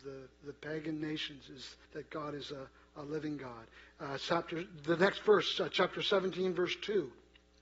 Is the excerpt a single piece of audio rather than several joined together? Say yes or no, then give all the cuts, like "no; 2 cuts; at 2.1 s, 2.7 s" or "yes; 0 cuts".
no; 1 cut; at 1.9 s